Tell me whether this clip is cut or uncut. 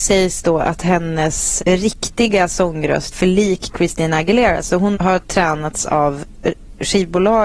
cut